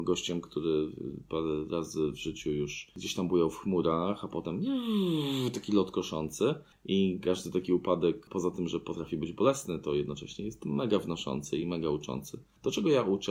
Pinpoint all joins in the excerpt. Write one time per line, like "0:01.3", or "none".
none